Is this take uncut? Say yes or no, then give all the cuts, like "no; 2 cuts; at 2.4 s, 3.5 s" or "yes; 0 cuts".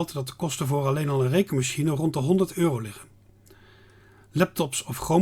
yes; 0 cuts